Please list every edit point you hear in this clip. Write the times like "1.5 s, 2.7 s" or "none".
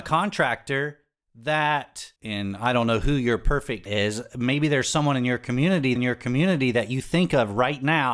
2.2 s, 3.9 s, 6.0 s